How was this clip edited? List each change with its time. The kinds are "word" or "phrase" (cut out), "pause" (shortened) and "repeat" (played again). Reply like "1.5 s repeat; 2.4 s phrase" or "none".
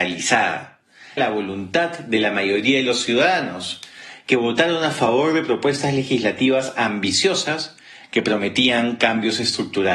1.2 s phrase

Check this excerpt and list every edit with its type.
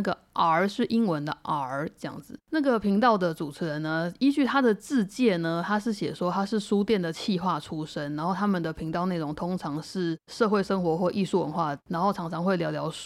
2.4 s pause

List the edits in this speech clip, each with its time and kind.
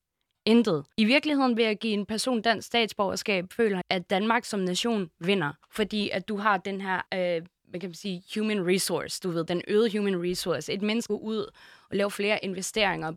0.9 s pause; 3.8 s word; 5.6 s pause; 7.1 s pause; 11.1 s phrase

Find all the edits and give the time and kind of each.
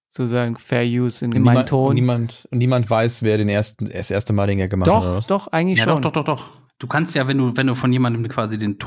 1.3 s phrase; 6.7 s pause

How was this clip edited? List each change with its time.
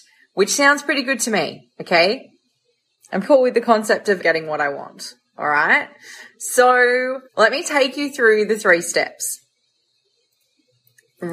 3.2 s word; 4.2 s word; 7.3 s pause

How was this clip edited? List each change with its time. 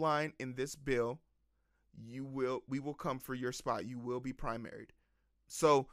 none

